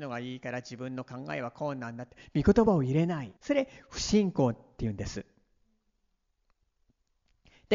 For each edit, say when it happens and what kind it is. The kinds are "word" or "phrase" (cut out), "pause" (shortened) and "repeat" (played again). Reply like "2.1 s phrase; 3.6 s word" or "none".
3.4 s pause